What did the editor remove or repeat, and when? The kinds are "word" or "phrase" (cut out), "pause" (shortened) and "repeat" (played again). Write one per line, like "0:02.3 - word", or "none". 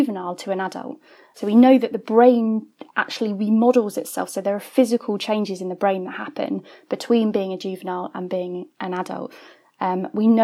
none